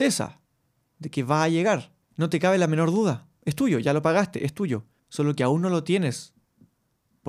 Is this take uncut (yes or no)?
no